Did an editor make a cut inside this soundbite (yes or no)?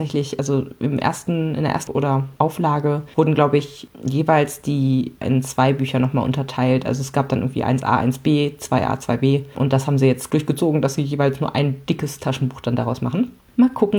yes